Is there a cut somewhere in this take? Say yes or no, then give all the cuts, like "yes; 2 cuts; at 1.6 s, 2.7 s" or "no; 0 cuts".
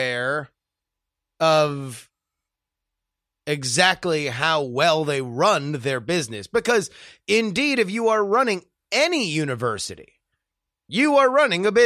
no; 0 cuts